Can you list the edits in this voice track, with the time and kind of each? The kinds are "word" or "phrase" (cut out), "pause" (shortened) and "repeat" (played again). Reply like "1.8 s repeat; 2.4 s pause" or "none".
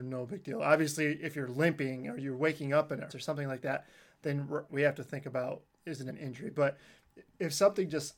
3.1 s word; 4.7 s word; 6.1 s word